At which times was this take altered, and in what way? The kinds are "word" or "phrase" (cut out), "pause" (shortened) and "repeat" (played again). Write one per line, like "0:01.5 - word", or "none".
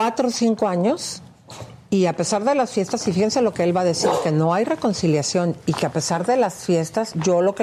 none